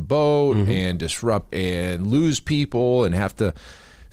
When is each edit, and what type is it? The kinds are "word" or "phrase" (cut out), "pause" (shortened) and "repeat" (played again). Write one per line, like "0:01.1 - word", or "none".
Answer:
0:01.5 - phrase